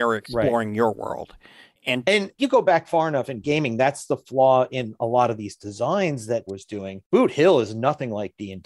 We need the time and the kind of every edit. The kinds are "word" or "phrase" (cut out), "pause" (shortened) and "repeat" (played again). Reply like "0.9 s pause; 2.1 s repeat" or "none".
2.4 s word; 6.5 s word